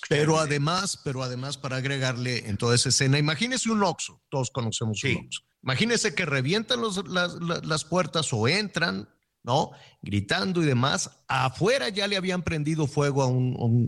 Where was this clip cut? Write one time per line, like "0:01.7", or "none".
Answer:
0:05.5